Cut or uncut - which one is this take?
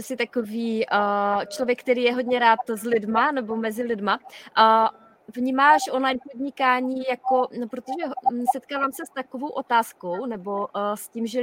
uncut